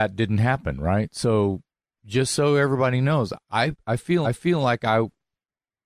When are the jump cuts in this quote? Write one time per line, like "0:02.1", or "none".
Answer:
0:01.8
0:03.4
0:04.2